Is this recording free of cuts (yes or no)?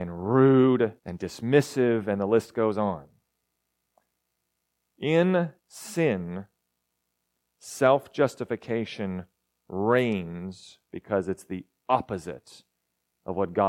no